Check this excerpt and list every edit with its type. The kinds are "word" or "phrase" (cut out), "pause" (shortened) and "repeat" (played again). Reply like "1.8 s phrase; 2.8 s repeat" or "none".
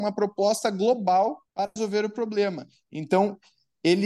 1.5 s pause